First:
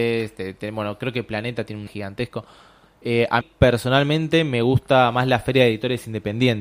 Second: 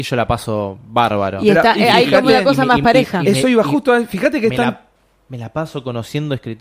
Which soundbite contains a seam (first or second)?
first